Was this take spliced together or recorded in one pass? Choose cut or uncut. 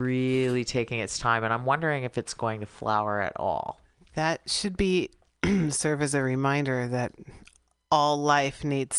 uncut